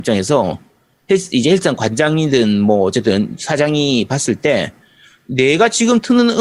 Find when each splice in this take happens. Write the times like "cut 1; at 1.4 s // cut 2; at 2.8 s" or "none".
none